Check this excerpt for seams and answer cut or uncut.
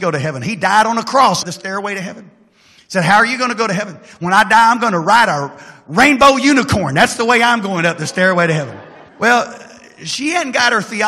cut